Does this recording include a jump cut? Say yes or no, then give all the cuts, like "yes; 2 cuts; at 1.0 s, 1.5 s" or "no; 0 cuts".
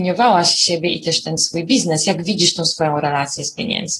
no; 0 cuts